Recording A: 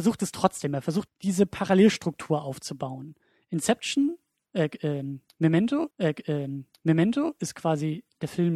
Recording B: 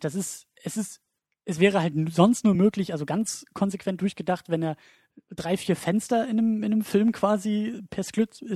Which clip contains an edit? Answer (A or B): A